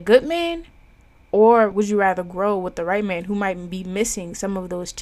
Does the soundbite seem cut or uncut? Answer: uncut